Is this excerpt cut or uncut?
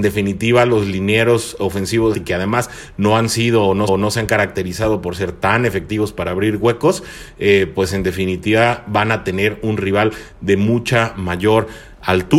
cut